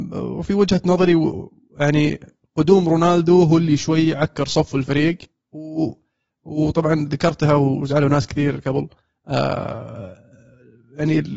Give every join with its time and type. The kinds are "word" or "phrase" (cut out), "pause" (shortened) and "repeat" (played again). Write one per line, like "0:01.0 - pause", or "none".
none